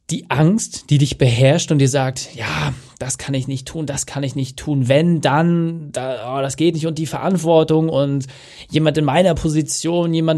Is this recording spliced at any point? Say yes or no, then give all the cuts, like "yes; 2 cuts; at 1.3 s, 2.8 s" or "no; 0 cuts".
no; 0 cuts